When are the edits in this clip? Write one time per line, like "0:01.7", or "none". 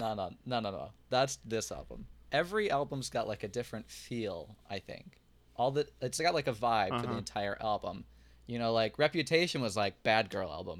none

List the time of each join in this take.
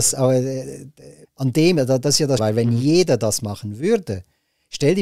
0:01.2
0:02.4

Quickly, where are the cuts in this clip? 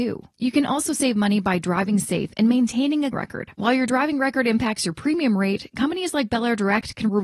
0:03.1

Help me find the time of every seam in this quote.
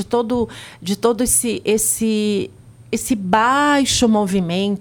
none

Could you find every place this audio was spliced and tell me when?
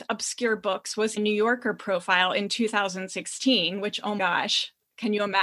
0:01.2
0:04.2

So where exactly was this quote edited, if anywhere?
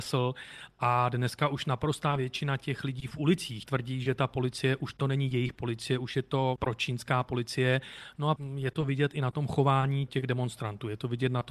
none

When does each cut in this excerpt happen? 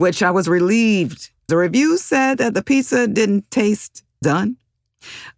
0:01.5
0:04.2

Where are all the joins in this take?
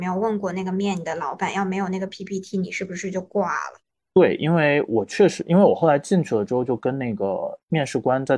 0:03.9

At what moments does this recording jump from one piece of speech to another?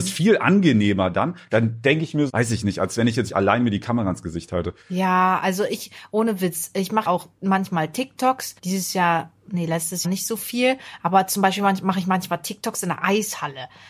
0:02.3
0:03.3
0:04.8
0:07.1
0:08.6
0:10.0

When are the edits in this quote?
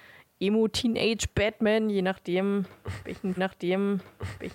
0:03.4

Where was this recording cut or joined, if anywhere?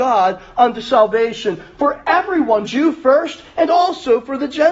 0:02.6

